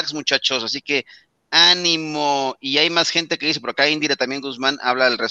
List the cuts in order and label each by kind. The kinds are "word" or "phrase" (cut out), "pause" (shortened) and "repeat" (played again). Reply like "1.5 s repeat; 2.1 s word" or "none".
none